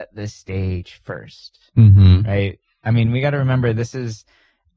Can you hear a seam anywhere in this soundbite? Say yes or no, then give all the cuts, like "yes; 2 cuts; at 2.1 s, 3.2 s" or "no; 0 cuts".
no; 0 cuts